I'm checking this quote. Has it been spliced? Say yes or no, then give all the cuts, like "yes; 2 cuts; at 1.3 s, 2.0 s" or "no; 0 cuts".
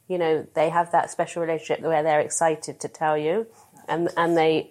no; 0 cuts